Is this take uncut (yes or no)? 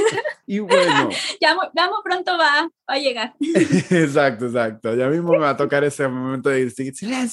yes